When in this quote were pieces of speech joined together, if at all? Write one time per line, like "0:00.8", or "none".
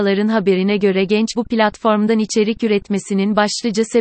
0:01.3